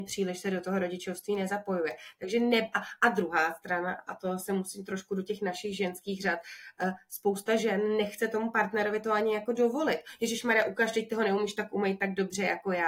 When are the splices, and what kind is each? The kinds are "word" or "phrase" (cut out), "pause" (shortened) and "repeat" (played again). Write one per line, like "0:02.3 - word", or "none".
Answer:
none